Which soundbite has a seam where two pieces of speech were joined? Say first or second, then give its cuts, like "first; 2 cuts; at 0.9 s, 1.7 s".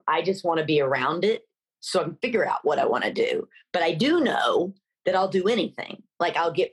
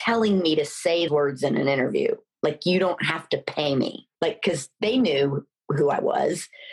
second; 2 cuts; at 1.1 s, 4.1 s